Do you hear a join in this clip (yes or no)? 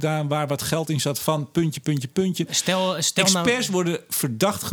no